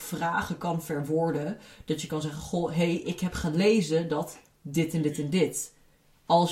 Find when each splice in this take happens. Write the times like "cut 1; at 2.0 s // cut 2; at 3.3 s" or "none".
none